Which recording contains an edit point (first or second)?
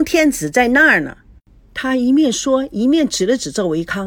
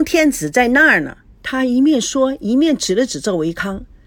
second